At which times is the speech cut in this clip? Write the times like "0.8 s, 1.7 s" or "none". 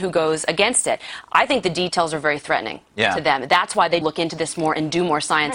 4.0 s

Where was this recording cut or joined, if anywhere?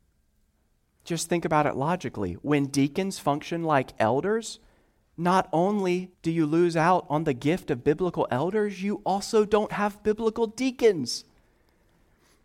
6.1 s

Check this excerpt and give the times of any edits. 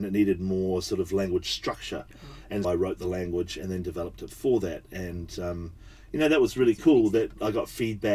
2.6 s

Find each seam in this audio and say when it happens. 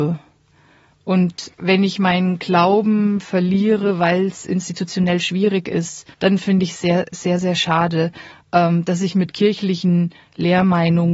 1.5 s, 6.1 s, 6.7 s

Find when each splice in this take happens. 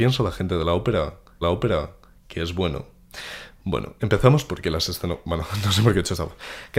1.4 s

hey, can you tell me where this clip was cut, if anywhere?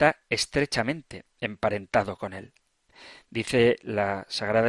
none

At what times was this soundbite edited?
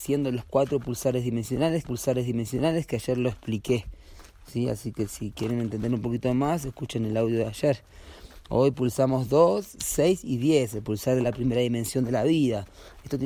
1.8 s

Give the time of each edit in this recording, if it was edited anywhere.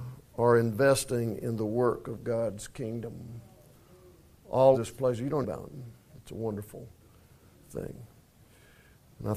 4.7 s, 5.4 s, 6.1 s

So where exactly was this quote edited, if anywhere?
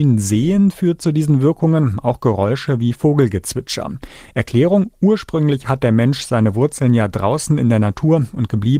none

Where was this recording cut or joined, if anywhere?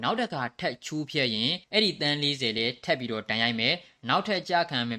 1.6 s

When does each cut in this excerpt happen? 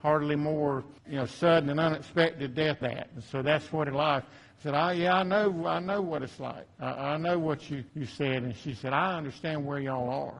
1.0 s, 2.8 s, 3.9 s, 7.9 s

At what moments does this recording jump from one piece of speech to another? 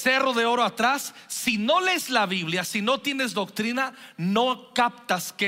none

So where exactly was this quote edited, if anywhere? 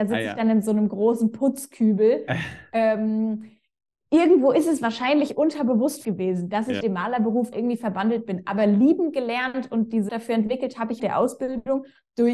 4.0 s, 6.0 s, 6.8 s, 7.5 s, 10.1 s, 11.0 s

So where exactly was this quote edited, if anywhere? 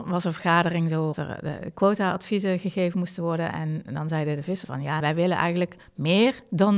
1.1 s, 4.6 s, 5.0 s

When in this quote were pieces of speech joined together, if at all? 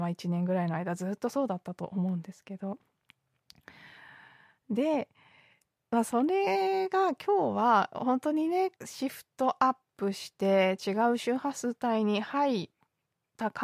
8.8 s

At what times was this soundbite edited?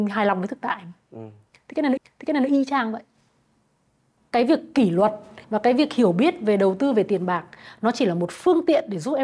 2.0 s, 4.2 s, 5.4 s

